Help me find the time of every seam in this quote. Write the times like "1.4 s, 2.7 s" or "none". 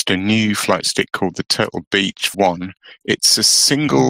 2.3 s